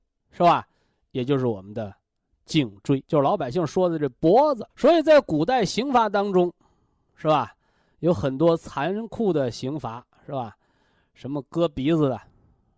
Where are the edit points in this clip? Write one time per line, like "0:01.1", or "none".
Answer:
0:03.1
0:04.7